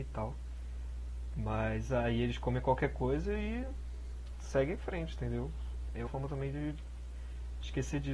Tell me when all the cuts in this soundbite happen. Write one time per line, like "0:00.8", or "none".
0:06.1